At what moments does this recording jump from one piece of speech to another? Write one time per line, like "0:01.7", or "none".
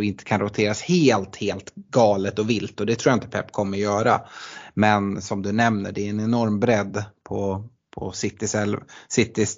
none